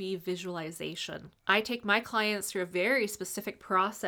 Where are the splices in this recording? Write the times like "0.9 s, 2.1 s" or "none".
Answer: 1.4 s